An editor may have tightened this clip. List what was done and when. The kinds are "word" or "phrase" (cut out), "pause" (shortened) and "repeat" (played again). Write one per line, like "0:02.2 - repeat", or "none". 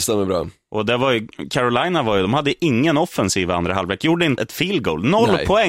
0:04.4 - word